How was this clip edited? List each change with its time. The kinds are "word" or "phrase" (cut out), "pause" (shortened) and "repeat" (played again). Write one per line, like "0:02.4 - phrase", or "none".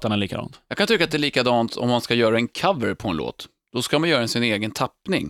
none